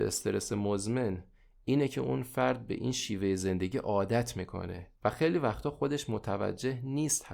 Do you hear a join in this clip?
yes; 1 cut; at 5.0 s

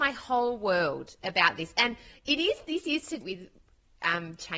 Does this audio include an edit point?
yes; 1 cut; at 3.2 s

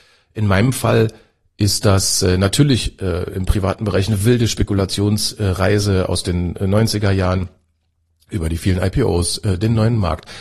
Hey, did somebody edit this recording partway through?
no; 0 cuts

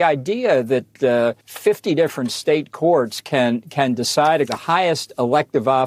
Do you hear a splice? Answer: yes; 2 cuts; at 1.4 s, 4.5 s

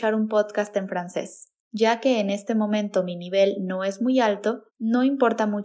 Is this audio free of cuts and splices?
no; 2 cuts; at 1.6 s, 4.7 s

